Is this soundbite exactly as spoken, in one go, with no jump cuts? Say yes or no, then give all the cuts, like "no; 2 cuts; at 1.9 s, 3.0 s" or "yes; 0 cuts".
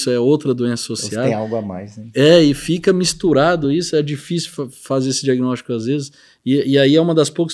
yes; 0 cuts